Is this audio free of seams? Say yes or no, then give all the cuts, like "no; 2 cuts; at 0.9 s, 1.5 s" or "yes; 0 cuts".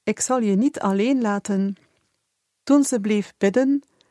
no; 1 cut; at 2.3 s